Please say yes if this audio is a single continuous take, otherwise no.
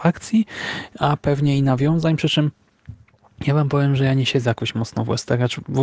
yes